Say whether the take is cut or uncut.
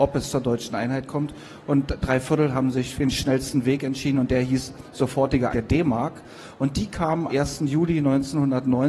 cut